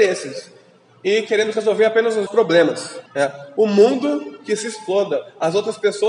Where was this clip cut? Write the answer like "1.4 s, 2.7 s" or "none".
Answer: 2.3 s, 3.1 s